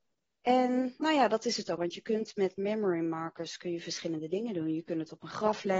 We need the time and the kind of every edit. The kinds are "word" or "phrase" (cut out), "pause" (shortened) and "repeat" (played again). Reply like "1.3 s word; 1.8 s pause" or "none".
1.8 s word